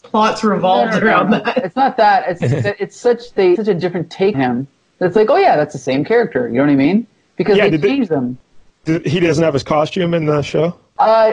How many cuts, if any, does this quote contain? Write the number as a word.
three